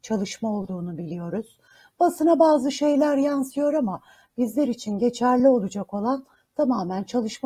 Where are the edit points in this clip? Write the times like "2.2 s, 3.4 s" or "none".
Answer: none